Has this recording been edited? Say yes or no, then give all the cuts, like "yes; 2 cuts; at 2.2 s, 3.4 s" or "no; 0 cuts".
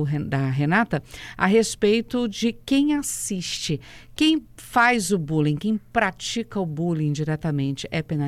no; 0 cuts